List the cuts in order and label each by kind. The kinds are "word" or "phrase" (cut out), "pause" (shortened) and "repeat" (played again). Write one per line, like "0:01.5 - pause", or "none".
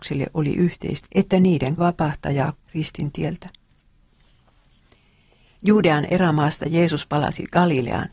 0:01.0 - word
0:01.8 - word
0:02.5 - phrase

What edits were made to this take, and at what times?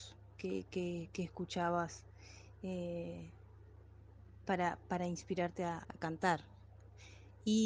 0:05.8 - phrase

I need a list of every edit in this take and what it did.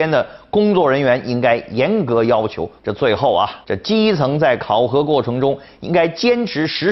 0:02.8 - pause
0:03.6 - pause

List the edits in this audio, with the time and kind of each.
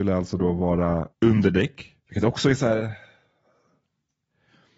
0:01.1 - pause
0:02.0 - pause

